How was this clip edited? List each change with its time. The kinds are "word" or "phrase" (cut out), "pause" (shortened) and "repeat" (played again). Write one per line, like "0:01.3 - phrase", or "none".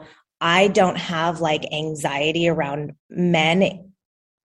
0:03.0 - pause